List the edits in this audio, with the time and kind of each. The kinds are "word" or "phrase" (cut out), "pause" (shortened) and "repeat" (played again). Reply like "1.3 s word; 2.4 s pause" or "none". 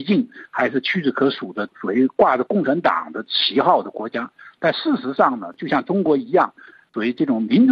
none